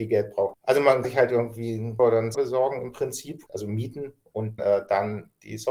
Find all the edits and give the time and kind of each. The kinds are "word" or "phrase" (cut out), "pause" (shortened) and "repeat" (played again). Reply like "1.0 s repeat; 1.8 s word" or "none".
1.0 s word; 2.0 s word; 2.3 s word; 3.5 s word; 4.6 s word